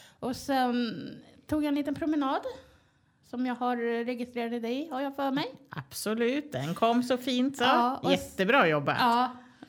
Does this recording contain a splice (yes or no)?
no